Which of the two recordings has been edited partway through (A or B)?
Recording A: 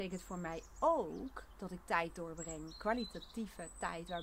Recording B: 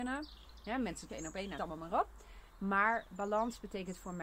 B